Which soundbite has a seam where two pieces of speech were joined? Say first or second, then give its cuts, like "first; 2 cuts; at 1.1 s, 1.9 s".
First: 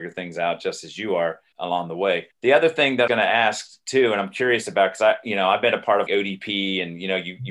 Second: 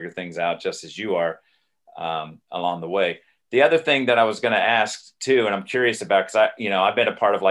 first; 4 cuts; at 1.5 s, 2.3 s, 3.1 s, 6.1 s